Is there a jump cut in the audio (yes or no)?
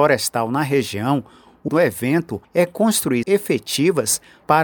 yes